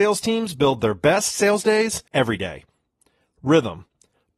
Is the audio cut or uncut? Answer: cut